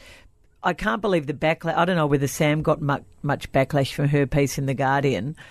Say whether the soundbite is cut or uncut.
uncut